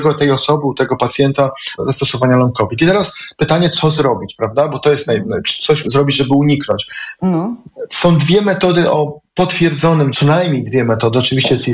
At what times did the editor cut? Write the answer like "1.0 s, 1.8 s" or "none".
1.8 s, 5.8 s, 10.1 s